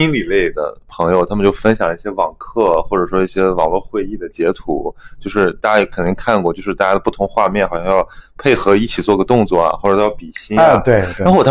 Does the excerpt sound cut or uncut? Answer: uncut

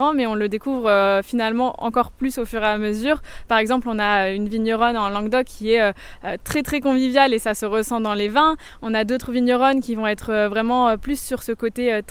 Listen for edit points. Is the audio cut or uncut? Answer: uncut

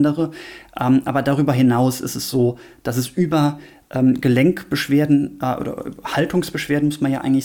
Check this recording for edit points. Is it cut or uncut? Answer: uncut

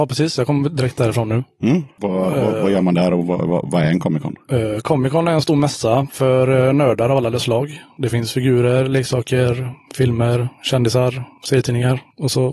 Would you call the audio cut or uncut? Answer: uncut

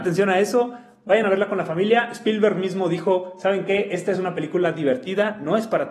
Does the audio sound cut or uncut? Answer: uncut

